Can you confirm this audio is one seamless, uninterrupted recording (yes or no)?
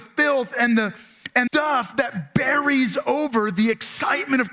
no